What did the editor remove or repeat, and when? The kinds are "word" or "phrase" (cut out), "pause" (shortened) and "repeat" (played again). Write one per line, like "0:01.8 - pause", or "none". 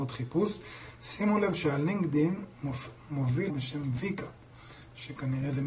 0:03.5 - word